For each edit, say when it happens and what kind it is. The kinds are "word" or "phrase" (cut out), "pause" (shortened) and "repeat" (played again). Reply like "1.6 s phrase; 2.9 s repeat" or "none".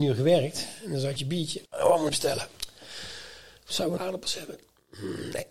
1.2 s phrase; 1.7 s pause; 2.1 s word; 4.0 s word